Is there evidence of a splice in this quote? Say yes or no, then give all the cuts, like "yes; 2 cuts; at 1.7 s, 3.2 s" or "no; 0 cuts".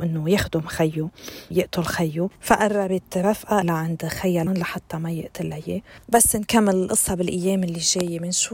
yes; 5 cuts; at 1.5 s, 2.4 s, 3.6 s, 4.5 s, 6.0 s